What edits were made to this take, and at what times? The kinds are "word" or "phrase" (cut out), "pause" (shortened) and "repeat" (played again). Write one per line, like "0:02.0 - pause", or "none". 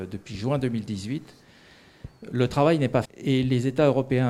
0:03.0 - word